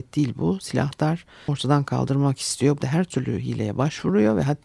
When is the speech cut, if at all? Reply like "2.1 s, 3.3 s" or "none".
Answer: 1.5 s, 2.8 s